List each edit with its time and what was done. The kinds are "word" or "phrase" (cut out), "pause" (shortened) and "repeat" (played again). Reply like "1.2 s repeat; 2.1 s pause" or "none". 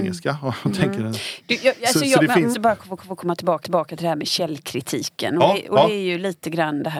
2.5 s word; 3.0 s repeat; 3.6 s repeat